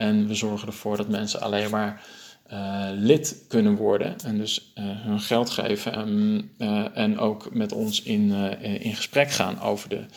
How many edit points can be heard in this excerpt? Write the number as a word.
one